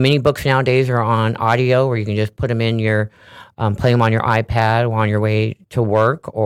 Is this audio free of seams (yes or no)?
yes